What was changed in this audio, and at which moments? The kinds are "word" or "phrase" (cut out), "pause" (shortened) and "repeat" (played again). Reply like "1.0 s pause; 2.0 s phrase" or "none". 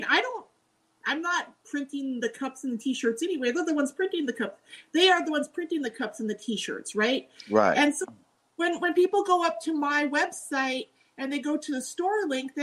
none